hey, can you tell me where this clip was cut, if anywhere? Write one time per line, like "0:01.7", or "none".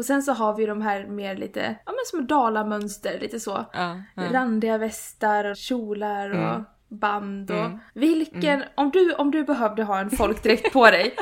0:01.8
0:05.5
0:07.9